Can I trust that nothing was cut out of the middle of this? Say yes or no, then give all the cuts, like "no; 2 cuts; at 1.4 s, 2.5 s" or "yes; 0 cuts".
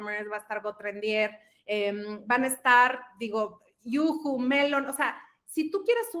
yes; 0 cuts